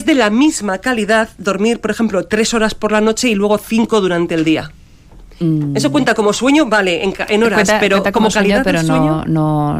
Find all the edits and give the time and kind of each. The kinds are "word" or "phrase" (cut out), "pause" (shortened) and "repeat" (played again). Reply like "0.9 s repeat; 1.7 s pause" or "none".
none